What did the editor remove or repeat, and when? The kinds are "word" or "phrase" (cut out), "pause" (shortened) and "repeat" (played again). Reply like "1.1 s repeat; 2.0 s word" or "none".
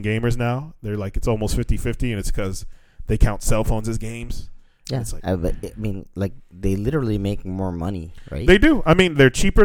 none